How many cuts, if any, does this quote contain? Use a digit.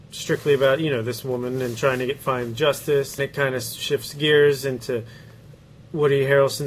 1